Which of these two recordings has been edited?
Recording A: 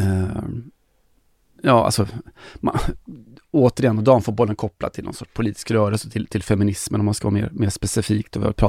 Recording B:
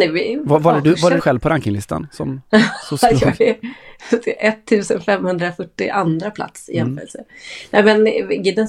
B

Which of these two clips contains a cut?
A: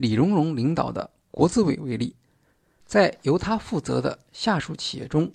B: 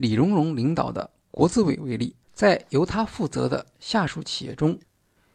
B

